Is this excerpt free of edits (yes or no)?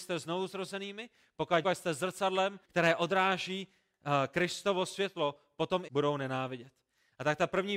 no